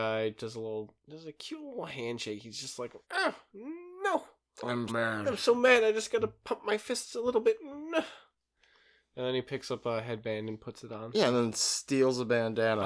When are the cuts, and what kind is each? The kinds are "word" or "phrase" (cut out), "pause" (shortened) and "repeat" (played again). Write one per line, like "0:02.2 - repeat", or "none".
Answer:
0:03.0 - pause
0:04.9 - word

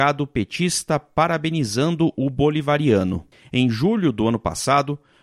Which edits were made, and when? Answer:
0:03.3 - pause

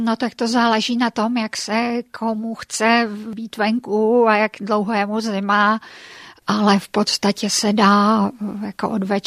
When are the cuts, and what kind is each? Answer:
none

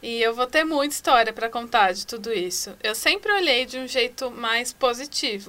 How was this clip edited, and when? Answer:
none

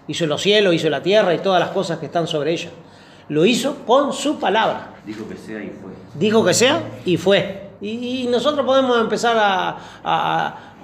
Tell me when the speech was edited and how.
0:05.0 - pause
0:06.1 - pause
0:07.8 - pause

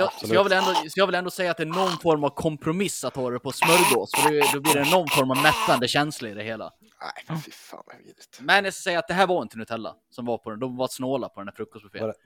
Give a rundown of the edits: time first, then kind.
none

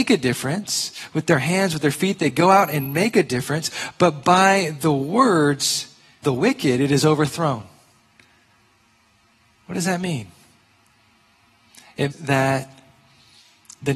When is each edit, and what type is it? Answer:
0:06.2 - word
0:12.1 - word

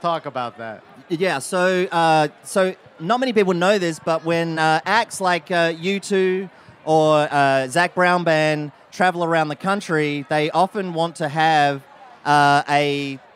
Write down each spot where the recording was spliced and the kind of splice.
none

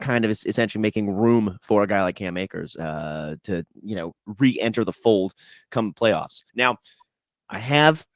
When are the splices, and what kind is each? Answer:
0:06.5 - pause

